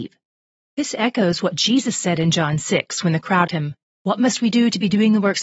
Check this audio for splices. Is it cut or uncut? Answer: cut